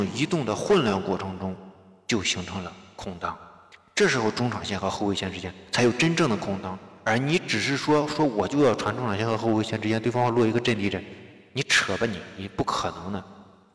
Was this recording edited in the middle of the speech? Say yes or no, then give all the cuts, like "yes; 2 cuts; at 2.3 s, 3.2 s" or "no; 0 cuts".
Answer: no; 0 cuts